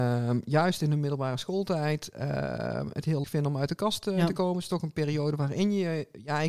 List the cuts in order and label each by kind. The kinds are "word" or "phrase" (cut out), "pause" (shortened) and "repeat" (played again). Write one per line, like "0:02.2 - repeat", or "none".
0:03.2 - word